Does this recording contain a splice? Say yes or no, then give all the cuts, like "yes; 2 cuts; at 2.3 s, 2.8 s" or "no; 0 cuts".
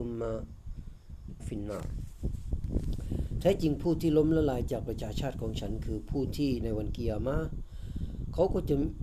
yes; 1 cut; at 1.4 s